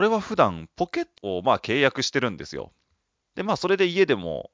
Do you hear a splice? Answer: yes; 1 cut; at 1.2 s

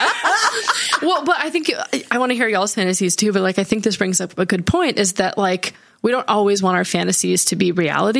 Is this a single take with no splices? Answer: yes; 0 cuts

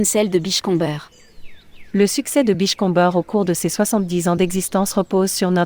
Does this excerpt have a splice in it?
no; 0 cuts

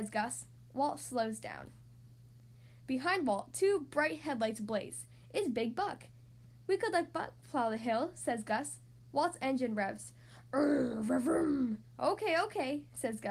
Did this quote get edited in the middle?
no; 0 cuts

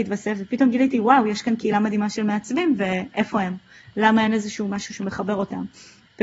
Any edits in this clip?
no; 0 cuts

